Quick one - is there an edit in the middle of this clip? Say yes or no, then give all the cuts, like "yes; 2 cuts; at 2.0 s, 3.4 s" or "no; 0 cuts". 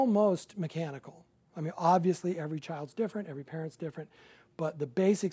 no; 0 cuts